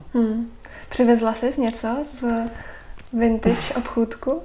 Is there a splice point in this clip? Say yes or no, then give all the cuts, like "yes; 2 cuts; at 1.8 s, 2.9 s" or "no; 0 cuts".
no; 0 cuts